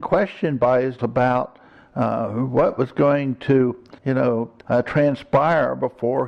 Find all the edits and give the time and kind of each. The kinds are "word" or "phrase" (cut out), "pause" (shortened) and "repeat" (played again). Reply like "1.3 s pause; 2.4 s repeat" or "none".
1.0 s word; 4.0 s pause; 4.6 s pause